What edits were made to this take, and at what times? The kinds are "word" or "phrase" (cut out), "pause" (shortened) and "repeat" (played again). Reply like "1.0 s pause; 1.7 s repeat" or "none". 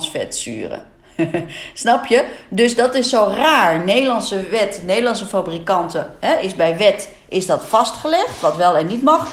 none